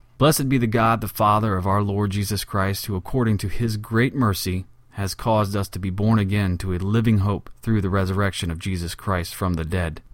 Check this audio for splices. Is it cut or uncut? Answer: uncut